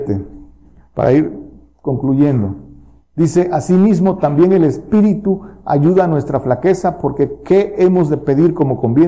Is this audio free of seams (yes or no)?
yes